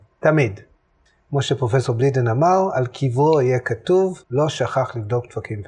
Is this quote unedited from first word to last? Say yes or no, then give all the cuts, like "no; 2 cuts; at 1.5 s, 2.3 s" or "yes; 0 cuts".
no; 1 cut; at 4.2 s